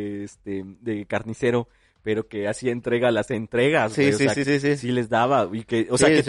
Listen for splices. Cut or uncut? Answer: cut